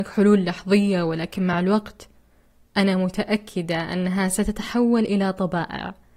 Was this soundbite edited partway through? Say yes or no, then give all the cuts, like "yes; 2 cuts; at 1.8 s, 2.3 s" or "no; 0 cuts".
no; 0 cuts